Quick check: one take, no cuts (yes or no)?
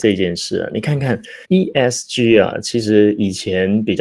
no